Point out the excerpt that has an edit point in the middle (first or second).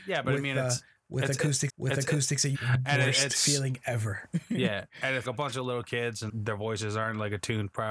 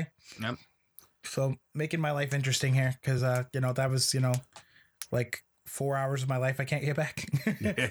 first